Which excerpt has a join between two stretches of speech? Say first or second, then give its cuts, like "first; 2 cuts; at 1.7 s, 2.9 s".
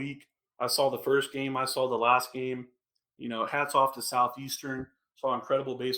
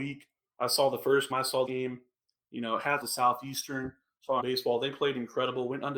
second; 4 cuts; at 1.3 s, 1.7 s, 3.0 s, 4.4 s